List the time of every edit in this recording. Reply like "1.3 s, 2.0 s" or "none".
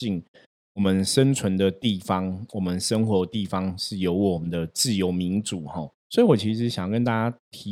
6.0 s